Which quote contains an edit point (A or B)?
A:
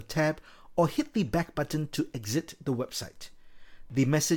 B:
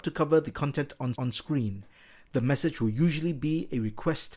B